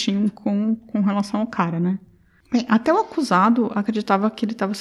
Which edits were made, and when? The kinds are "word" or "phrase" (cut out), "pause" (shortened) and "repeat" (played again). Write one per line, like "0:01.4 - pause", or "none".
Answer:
none

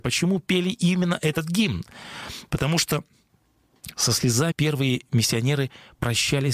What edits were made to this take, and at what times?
0:04.5 - phrase

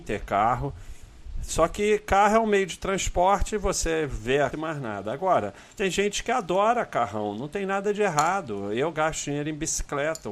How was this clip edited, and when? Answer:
0:04.5 - phrase
0:05.7 - pause

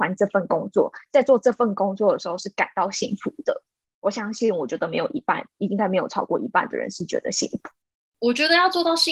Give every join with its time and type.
0:01.1 - pause

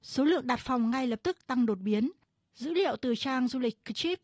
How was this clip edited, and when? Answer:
none

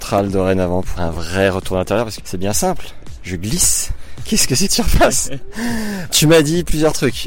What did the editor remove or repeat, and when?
0:01.0 - word
0:02.2 - word
0:04.7 - word
0:06.1 - word

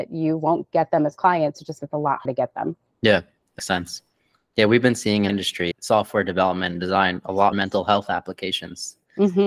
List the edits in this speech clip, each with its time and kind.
0:01.8 - word
0:02.3 - word
0:03.6 - word
0:05.3 - word
0:05.7 - word
0:07.5 - word

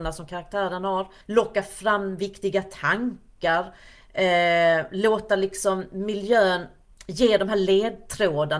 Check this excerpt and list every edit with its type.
0:01.2 - pause

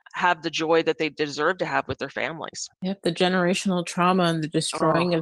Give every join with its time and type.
0:02.7 - pause

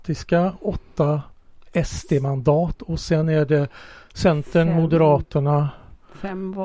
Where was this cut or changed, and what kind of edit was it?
none

